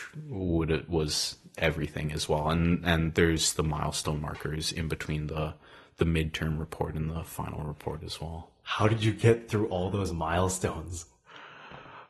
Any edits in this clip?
no; 0 cuts

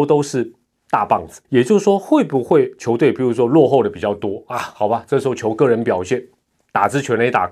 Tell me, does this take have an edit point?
yes; 1 cut; at 1.4 s

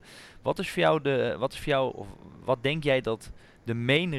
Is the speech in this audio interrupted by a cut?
no; 0 cuts

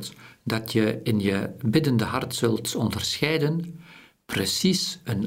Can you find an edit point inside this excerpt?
no; 0 cuts

